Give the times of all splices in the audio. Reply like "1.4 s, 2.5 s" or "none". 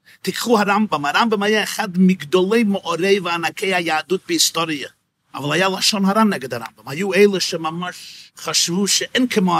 5.1 s, 8.3 s